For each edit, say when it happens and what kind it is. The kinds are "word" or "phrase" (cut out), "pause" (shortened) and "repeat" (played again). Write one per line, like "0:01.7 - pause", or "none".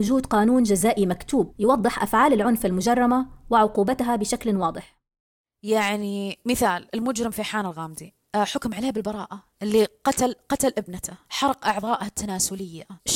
none